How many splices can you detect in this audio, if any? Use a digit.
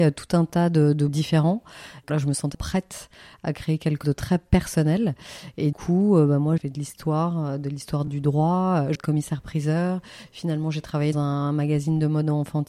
9